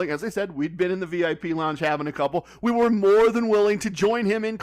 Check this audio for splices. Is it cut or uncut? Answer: uncut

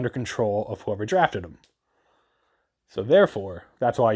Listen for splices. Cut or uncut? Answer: uncut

